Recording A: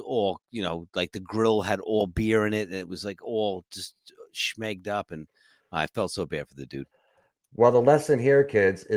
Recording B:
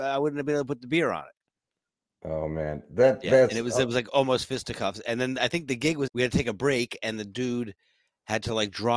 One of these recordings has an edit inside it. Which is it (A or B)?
B